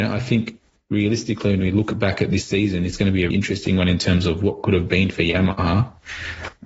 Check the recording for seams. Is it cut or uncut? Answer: cut